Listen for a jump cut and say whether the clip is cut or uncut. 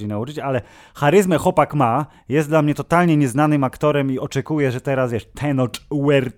uncut